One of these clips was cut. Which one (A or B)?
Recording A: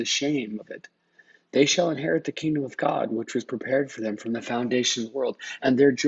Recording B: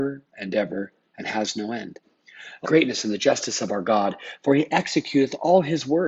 B